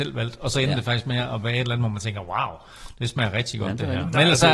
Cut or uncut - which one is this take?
uncut